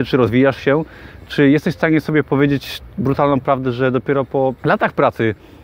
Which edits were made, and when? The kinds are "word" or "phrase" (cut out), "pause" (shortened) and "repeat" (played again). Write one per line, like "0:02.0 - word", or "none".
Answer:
0:04.6 - pause